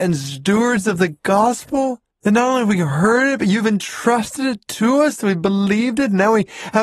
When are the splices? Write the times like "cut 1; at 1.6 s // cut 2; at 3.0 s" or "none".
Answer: cut 1; at 2.1 s